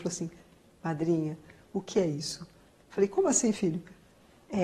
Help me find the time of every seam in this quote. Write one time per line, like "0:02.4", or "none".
none